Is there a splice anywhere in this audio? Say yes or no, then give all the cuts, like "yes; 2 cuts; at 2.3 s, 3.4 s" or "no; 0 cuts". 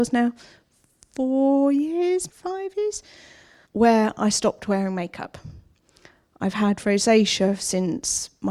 yes; 2 cuts; at 2.3 s, 3.6 s